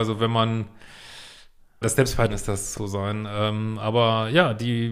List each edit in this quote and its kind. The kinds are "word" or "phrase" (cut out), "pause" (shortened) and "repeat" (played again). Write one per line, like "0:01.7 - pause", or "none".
0:01.8 - word
0:02.3 - word
0:02.8 - word